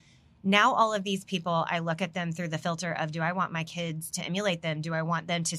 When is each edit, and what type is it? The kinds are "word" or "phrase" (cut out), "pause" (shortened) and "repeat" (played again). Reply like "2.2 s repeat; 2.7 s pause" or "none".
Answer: none